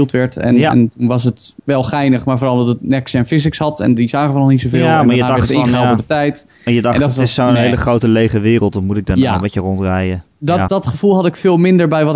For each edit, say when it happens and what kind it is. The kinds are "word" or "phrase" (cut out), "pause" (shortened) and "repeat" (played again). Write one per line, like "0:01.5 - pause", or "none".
0:01.6 - pause
0:10.7 - word